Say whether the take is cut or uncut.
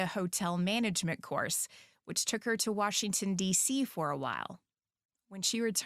uncut